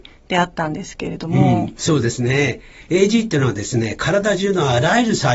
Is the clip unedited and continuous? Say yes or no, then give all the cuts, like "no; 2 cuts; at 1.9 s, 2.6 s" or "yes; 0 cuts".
yes; 0 cuts